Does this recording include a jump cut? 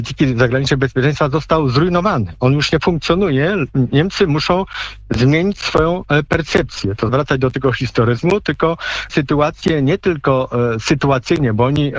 yes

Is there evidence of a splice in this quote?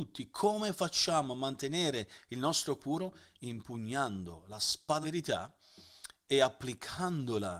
yes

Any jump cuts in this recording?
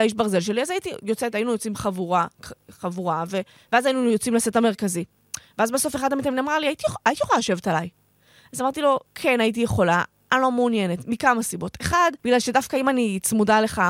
yes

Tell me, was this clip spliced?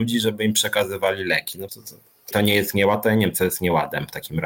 yes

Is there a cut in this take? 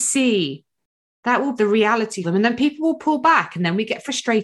yes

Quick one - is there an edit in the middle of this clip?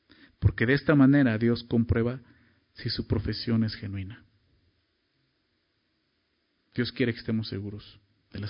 no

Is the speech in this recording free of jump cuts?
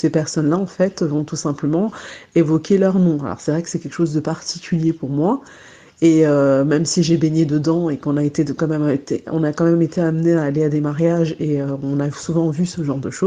yes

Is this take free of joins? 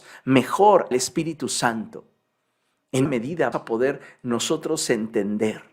no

